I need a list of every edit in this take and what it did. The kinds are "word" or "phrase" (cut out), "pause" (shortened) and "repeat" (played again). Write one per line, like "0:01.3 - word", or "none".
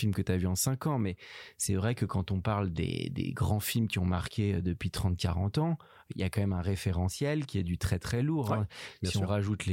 none